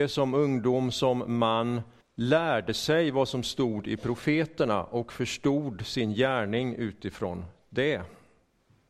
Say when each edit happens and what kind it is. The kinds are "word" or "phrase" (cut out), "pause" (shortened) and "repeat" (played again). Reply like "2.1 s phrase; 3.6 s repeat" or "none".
2.0 s pause

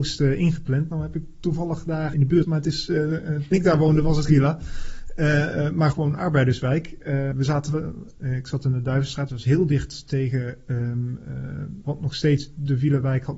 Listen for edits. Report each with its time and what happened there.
2.1 s word; 2.4 s word; 3.5 s word; 4.3 s word; 5.9 s word; 7.3 s word; 9.3 s word; 11.8 s word

